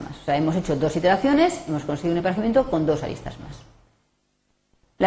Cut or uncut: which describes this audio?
uncut